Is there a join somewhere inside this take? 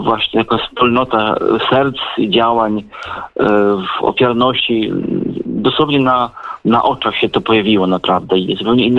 no; 0 cuts

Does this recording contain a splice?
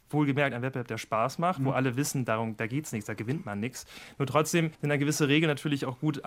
yes; 1 cut; at 4.7 s

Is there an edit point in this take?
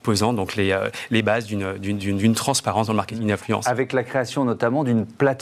no; 0 cuts

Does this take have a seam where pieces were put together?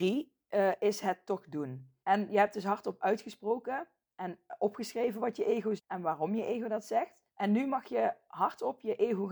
yes; 3 cuts; at 2.0 s, 5.8 s, 7.3 s

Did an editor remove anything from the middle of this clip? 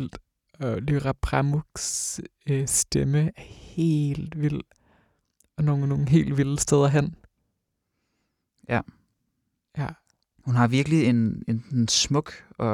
no; 0 cuts

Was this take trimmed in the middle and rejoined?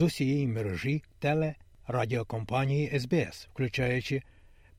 yes; 1 cut; at 1.1 s

